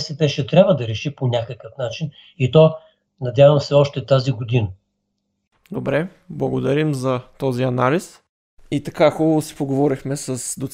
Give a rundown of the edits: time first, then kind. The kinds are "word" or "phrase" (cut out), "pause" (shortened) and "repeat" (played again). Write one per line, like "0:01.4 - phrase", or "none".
none